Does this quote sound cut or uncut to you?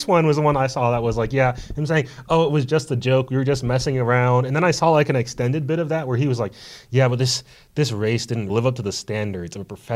cut